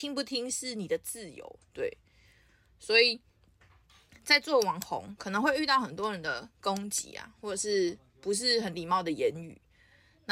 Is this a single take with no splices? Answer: yes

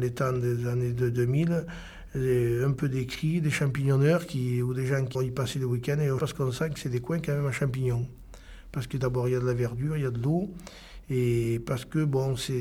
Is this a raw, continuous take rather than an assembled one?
no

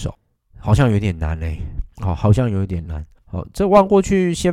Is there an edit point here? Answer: yes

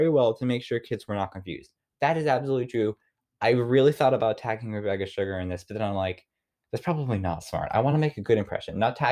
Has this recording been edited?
no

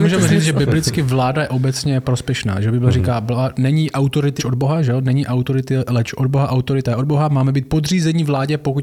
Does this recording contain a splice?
yes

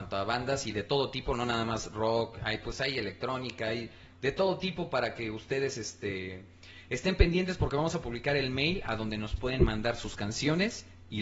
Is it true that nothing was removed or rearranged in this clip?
yes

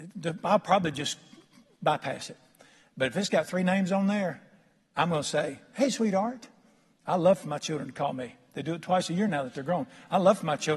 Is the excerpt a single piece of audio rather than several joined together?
yes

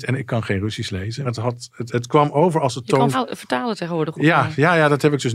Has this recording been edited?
yes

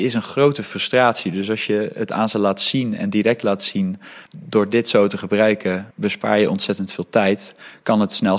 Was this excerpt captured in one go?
no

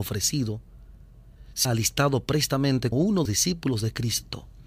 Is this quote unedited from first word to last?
no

